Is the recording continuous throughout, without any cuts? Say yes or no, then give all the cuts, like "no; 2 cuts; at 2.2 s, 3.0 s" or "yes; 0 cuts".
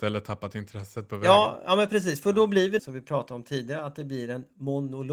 no; 1 cut; at 2.8 s